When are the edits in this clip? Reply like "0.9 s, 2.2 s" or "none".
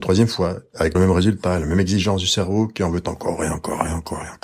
0.9 s